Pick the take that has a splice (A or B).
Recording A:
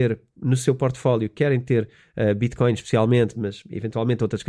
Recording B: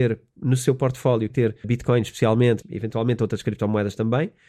B